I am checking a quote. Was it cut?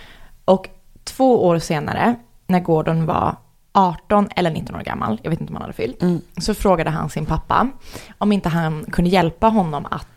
no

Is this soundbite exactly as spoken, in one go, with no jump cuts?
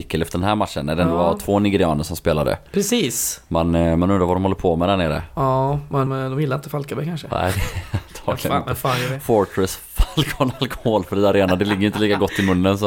no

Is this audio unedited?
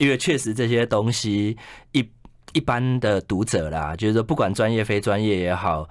yes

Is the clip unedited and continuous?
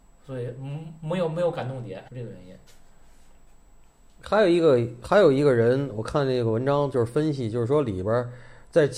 no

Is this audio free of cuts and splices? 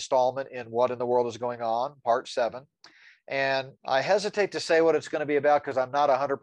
no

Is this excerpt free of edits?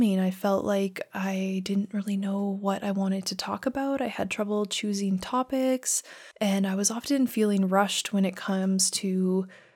no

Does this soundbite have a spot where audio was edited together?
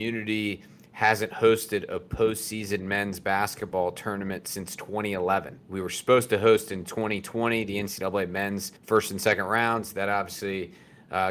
yes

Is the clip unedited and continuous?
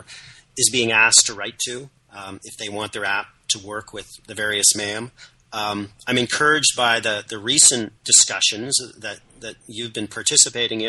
no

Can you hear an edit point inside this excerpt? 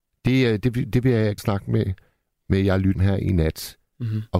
yes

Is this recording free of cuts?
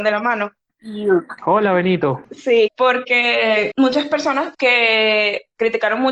no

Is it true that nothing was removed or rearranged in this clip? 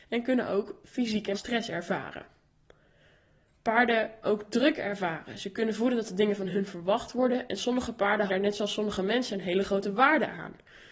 no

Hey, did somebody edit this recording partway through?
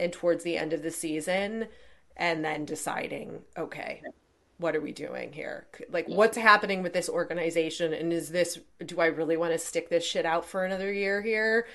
no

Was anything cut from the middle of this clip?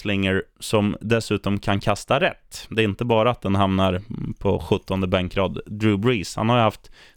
no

